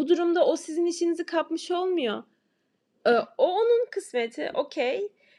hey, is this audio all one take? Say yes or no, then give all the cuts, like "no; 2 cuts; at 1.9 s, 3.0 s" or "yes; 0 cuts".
yes; 0 cuts